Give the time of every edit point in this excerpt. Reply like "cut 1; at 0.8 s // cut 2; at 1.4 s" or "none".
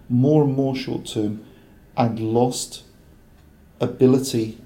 none